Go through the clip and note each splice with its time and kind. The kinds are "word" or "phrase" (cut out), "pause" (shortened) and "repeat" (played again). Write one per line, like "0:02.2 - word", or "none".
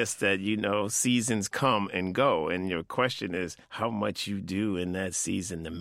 0:03.6 - pause